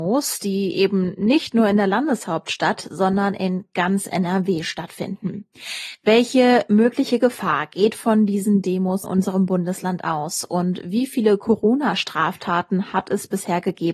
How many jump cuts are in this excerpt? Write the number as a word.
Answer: one